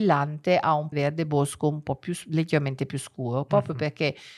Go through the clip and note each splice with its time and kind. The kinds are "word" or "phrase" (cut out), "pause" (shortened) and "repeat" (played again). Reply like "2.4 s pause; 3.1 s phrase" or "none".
0.9 s phrase

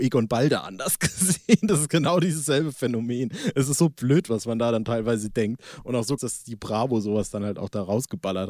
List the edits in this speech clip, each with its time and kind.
6.2 s word

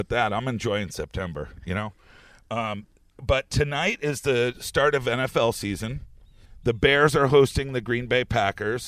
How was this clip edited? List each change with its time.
none

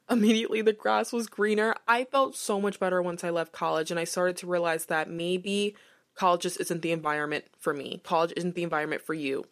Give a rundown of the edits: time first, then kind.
none

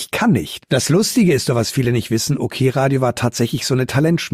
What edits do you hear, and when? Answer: none

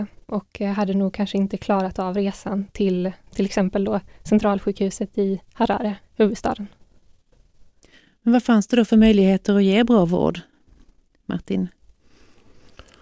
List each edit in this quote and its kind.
6.0 s pause

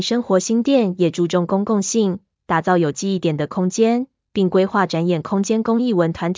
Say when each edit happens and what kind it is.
none

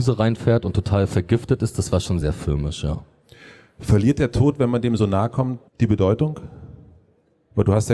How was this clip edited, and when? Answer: 2.2 s word; 5.7 s pause

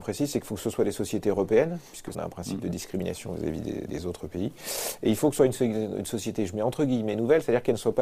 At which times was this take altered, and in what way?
2.1 s word; 3.9 s word; 5.4 s word

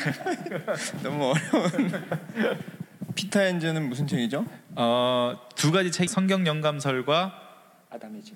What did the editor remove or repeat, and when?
6.1 s word

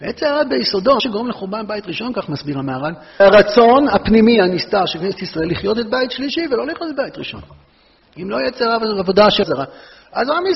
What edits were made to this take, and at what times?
1.0 s word; 3.2 s word; 9.4 s word

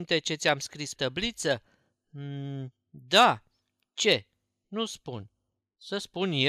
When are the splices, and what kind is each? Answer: 0.9 s word

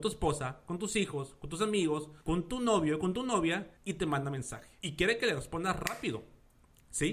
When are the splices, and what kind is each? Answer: 2.2 s pause; 3.8 s pause; 4.8 s pause

